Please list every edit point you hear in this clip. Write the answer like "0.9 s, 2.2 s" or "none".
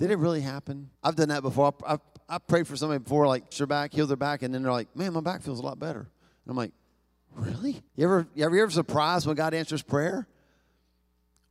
1.0 s, 3.5 s, 7.9 s